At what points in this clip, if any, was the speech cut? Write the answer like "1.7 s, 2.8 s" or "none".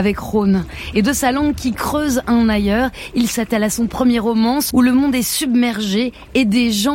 4.7 s

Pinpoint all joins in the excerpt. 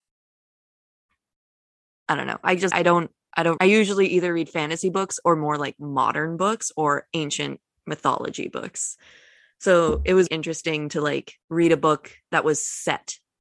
2.7 s, 3.6 s, 10.3 s, 11.4 s

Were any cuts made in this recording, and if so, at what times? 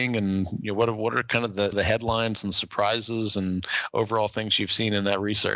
1.7 s

